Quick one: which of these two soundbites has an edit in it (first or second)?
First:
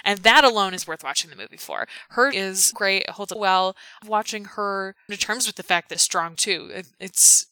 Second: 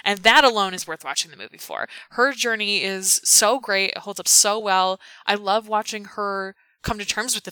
first